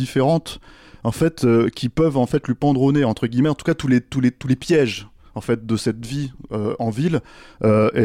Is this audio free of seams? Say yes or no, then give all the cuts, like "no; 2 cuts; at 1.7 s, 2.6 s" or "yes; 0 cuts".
yes; 0 cuts